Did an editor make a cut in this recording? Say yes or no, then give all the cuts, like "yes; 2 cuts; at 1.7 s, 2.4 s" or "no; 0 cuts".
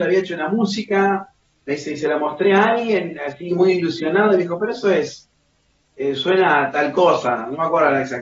no; 0 cuts